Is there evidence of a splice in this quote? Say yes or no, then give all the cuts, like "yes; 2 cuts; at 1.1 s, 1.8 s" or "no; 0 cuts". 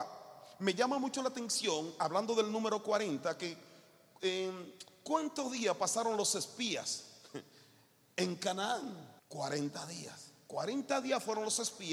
yes; 1 cut; at 9.2 s